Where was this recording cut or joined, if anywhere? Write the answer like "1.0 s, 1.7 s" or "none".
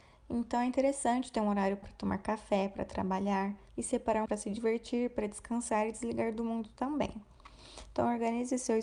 1.8 s, 3.7 s, 4.3 s